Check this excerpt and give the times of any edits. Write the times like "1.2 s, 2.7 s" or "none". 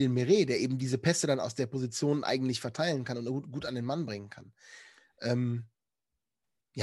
none